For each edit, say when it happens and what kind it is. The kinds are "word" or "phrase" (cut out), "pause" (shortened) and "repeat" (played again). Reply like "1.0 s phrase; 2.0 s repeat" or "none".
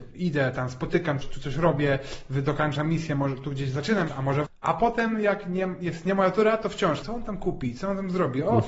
1.2 s word; 4.1 s word; 4.4 s word; 7.0 s word